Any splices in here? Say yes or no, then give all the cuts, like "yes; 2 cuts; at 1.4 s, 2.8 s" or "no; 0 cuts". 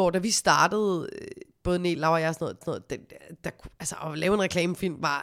yes; 1 cut; at 2.6 s